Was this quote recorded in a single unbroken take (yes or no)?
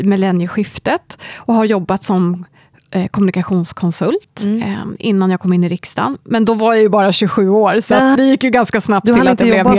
no